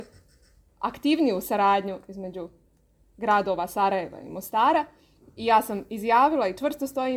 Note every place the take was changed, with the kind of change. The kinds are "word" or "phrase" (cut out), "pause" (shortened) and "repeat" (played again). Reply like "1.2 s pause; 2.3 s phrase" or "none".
none